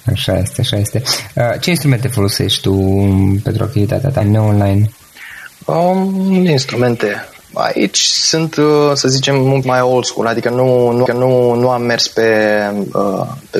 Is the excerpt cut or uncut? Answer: cut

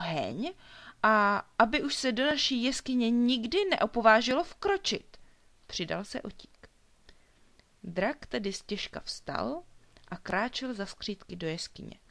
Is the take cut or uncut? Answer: uncut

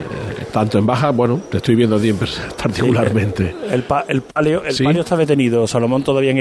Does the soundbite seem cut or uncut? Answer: uncut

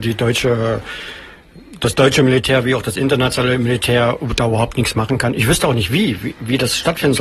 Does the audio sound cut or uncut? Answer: uncut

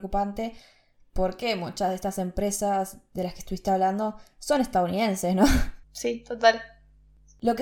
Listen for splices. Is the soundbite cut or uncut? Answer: uncut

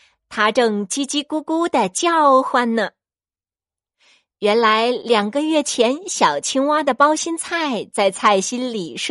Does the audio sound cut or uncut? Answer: uncut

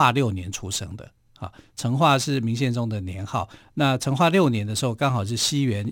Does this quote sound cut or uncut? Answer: uncut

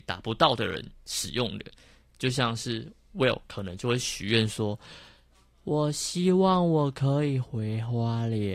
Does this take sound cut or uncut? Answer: uncut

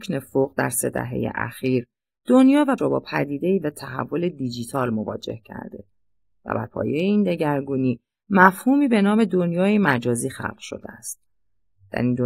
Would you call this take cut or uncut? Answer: cut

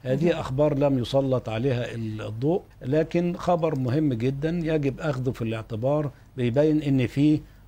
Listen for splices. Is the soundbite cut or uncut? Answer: cut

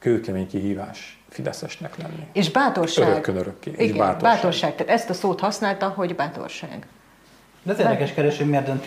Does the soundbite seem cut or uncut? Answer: uncut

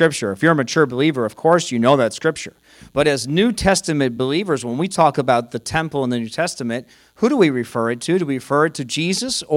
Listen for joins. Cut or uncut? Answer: uncut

